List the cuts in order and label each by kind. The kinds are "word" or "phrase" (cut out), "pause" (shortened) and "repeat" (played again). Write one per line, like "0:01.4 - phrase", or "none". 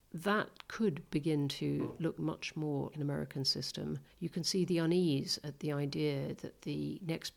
0:02.2 - word
0:02.9 - word
0:04.1 - pause